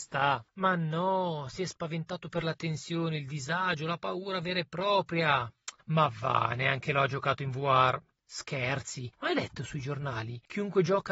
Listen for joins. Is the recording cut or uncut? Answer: uncut